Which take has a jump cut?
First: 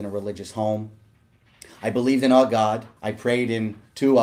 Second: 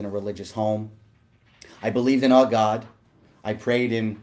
first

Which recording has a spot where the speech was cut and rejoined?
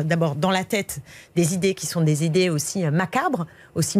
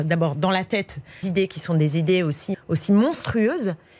second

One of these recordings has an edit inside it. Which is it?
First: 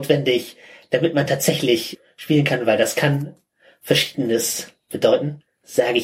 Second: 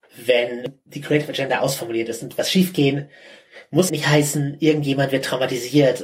second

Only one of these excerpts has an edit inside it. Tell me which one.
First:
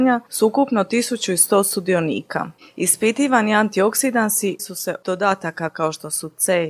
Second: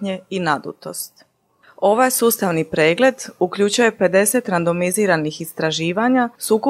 first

